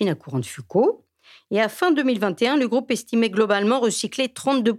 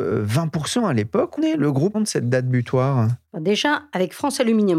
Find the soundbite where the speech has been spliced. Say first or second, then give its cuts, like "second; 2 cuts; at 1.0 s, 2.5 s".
second; 2 cuts; at 1.4 s, 1.9 s